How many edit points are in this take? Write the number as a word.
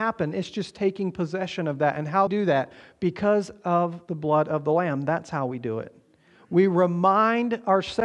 one